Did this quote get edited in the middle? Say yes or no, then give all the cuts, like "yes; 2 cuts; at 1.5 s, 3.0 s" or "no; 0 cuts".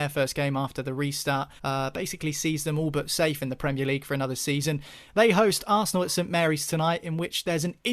yes; 1 cut; at 1.6 s